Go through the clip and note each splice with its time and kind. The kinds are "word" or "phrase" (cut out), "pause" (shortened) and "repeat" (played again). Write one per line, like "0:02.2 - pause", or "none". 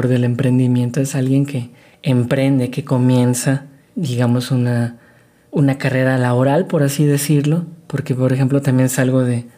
none